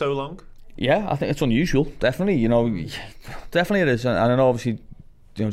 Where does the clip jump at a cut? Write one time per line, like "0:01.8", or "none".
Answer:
none